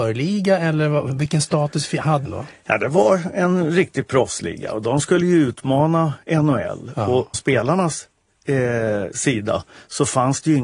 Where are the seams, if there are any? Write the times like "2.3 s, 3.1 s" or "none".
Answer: 2.3 s, 7.3 s